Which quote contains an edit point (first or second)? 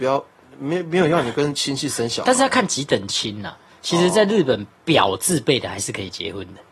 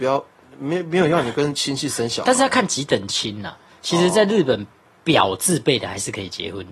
first